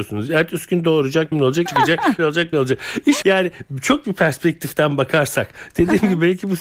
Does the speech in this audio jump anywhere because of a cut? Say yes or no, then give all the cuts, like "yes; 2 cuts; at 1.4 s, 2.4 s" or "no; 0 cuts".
yes; 6 cuts; at 1.3 s, 1.7 s, 2.2 s, 2.5 s, 3.2 s, 4.0 s